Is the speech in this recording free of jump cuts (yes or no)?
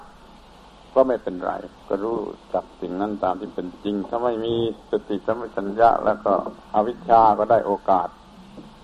no